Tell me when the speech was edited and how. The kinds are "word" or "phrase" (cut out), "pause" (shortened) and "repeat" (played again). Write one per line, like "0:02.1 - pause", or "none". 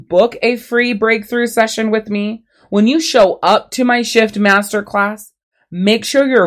none